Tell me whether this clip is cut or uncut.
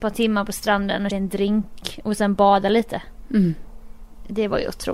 cut